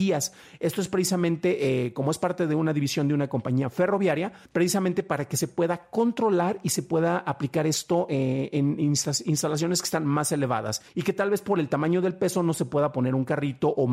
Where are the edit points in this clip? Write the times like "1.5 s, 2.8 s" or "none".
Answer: 4.5 s, 10.9 s